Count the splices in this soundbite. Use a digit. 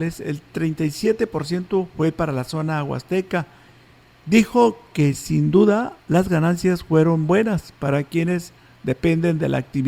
1